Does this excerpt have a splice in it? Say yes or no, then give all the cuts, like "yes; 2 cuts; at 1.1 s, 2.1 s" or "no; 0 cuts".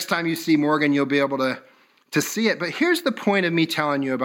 no; 0 cuts